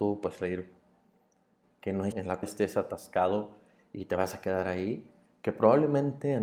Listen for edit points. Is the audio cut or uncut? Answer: cut